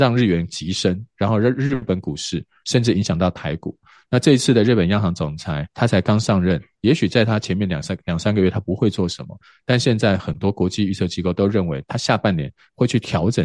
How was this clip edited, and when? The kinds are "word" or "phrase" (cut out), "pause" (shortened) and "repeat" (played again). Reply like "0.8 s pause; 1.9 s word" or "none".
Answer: 5.7 s pause